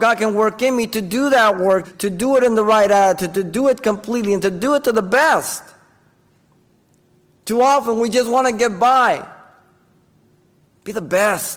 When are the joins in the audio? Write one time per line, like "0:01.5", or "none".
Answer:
0:01.8